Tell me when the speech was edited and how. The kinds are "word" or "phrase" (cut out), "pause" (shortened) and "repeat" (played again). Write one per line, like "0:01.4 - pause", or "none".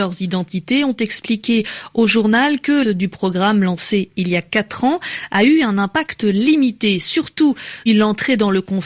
0:02.8 - word
0:07.9 - word